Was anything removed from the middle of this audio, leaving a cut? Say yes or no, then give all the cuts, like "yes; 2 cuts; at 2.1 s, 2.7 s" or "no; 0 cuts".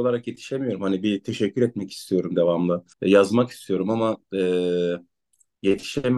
yes; 1 cut; at 2.9 s